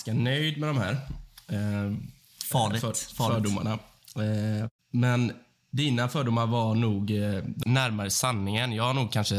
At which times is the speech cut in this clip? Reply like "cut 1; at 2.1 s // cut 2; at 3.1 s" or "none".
cut 1; at 4.8 s // cut 2; at 7.6 s